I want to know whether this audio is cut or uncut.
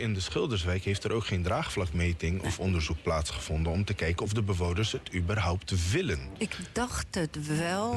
uncut